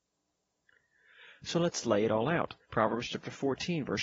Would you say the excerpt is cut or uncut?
cut